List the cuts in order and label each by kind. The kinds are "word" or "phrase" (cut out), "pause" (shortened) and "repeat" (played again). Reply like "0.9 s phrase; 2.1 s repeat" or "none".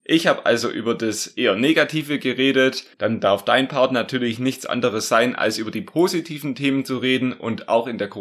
2.9 s pause